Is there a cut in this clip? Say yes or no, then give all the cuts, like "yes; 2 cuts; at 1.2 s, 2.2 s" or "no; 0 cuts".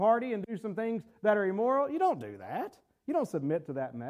no; 0 cuts